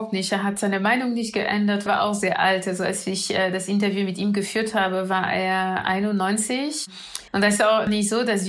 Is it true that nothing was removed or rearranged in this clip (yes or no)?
no